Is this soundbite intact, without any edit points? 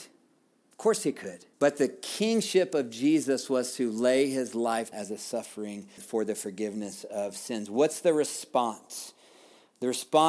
no; 3 cuts; at 1.5 s, 4.9 s, 6.0 s

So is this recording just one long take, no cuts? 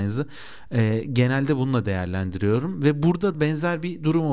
no; 1 cut; at 3.3 s

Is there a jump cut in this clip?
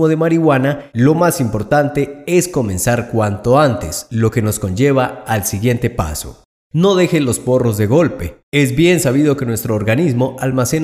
no; 0 cuts

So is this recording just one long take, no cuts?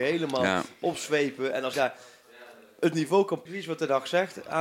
no; 2 cuts; at 1.7 s, 3.5 s

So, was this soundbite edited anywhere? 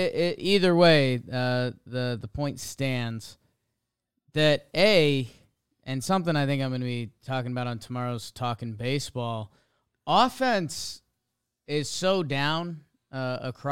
no; 0 cuts

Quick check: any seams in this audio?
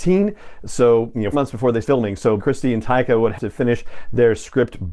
yes; 4 cuts; at 1.3 s, 1.8 s, 2.4 s, 3.4 s

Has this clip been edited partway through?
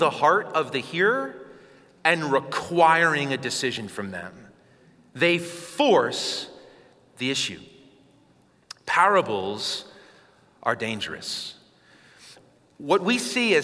no; 0 cuts

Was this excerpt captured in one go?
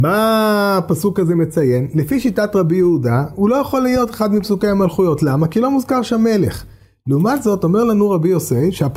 yes; 0 cuts

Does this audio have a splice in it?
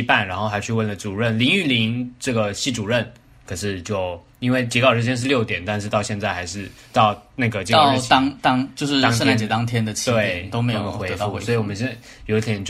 no; 0 cuts

